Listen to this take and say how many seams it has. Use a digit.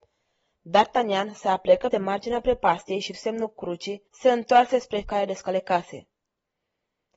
4